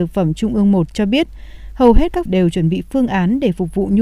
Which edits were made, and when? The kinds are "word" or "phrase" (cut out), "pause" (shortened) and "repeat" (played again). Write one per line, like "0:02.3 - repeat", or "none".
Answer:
0:02.3 - phrase